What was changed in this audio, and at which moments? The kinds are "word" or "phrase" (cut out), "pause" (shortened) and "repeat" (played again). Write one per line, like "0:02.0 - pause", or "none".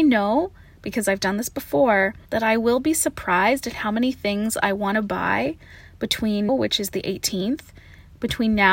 0:02.3 - pause
0:06.5 - word